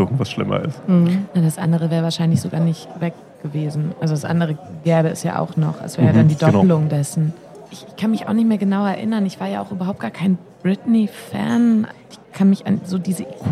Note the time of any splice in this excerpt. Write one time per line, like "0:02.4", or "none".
none